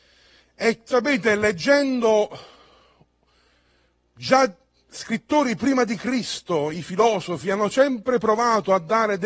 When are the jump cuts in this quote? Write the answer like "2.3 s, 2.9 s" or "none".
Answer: none